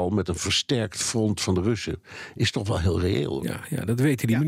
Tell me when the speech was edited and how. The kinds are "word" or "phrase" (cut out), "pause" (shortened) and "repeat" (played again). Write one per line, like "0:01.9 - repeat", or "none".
none